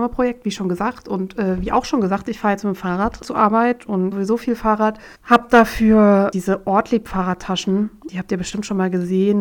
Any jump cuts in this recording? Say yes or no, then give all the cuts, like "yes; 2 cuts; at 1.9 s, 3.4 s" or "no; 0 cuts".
yes; 2 cuts; at 4.1 s, 5.1 s